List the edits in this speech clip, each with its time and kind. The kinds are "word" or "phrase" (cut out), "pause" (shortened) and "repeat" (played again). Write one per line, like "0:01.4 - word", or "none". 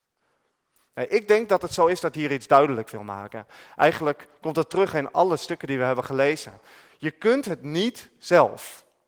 0:02.1 - word